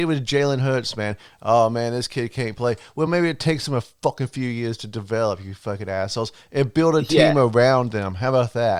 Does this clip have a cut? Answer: no; 0 cuts

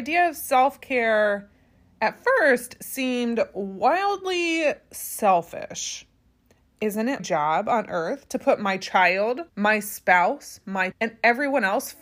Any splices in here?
yes; 3 cuts; at 7.2 s, 9.5 s, 10.9 s

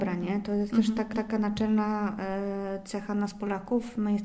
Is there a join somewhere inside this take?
yes; 1 cut; at 1.1 s

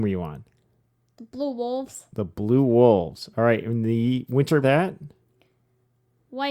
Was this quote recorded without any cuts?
no; 1 cut; at 4.6 s

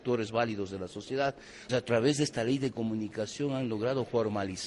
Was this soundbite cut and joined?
yes; 1 cut; at 1.7 s

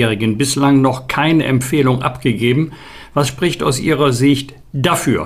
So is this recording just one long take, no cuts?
yes; 0 cuts

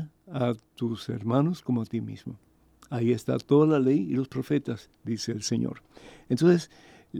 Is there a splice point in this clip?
no; 0 cuts

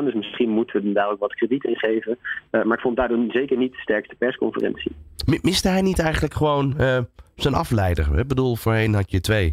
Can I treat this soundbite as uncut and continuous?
yes; 0 cuts

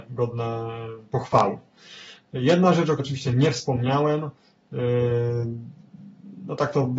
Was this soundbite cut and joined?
yes; 1 cut; at 3.0 s

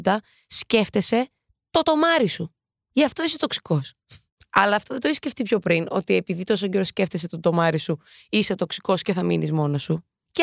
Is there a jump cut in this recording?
no; 0 cuts

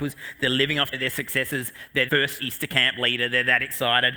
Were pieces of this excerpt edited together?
yes; 3 cuts; at 0.9 s, 2.1 s, 2.4 s

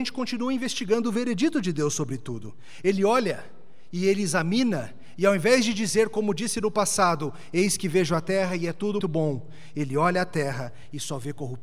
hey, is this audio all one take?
no; 1 cut; at 9.0 s

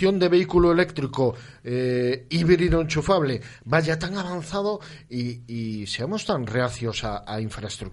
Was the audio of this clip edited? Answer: no; 0 cuts

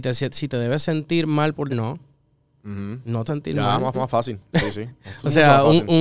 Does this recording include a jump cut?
yes; 3 cuts; at 1.7 s, 3.3 s, 3.9 s

